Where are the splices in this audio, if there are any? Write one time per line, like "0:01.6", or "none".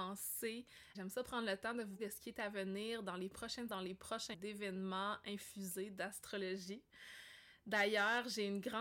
0:00.9
0:02.0
0:03.7
0:04.3